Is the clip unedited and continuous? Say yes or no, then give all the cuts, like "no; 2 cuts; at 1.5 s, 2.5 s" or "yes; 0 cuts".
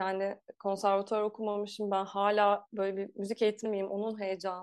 no; 1 cut; at 3.6 s